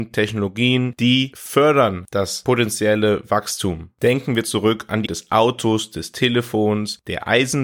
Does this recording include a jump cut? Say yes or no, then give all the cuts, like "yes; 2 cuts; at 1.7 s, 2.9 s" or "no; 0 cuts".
yes; 1 cut; at 5.1 s